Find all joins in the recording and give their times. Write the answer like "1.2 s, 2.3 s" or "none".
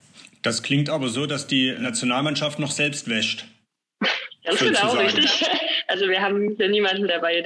none